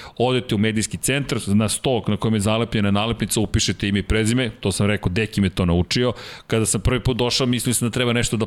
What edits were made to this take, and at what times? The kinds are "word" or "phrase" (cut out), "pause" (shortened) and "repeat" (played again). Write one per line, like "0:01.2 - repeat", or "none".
none